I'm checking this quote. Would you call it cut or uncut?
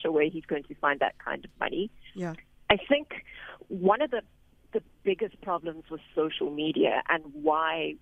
uncut